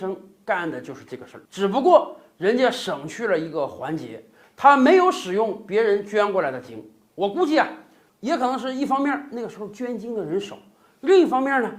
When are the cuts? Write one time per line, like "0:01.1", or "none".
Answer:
0:01.4